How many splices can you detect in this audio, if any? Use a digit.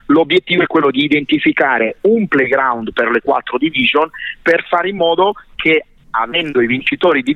0